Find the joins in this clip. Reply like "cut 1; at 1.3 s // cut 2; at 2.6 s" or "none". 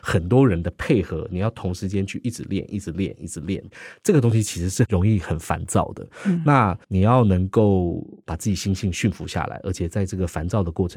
cut 1; at 6.8 s